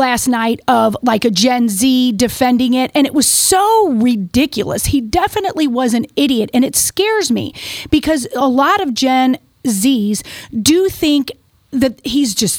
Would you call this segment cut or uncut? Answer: uncut